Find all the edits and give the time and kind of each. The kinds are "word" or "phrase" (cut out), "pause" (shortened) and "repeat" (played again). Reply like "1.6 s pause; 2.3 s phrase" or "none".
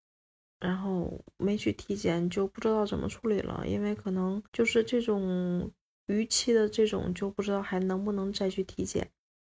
4.4 s pause